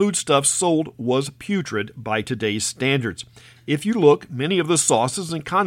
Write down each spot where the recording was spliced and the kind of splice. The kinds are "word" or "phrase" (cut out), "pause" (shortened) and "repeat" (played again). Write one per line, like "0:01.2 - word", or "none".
none